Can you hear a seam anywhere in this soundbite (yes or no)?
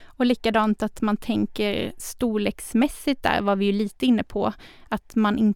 no